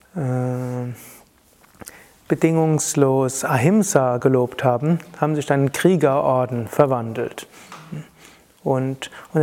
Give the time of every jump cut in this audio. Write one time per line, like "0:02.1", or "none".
none